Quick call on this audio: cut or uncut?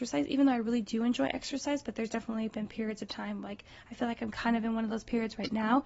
uncut